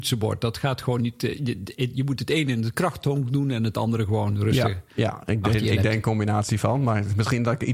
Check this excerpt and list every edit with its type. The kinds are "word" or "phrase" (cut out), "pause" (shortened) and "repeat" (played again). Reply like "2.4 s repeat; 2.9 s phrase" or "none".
none